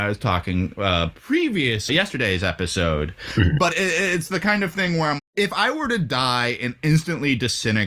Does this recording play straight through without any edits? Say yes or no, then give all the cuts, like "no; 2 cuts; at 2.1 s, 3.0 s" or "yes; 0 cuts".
no; 3 cuts; at 1.9 s, 3.7 s, 5.2 s